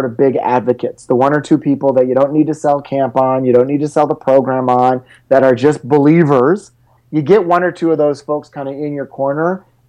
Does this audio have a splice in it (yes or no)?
no